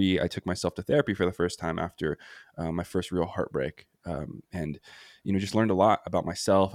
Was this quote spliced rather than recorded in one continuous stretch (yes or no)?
no